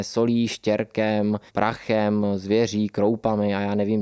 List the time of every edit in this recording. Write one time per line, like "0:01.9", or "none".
0:01.5